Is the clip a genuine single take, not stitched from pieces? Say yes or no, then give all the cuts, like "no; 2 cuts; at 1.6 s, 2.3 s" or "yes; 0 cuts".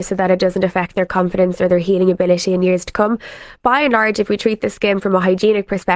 yes; 0 cuts